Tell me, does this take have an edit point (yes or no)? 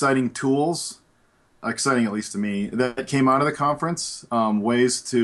no